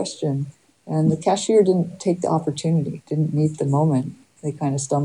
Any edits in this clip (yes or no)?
no